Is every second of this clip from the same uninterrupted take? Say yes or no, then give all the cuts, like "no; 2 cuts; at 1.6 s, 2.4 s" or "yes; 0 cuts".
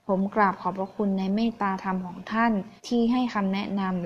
no; 1 cut; at 2.8 s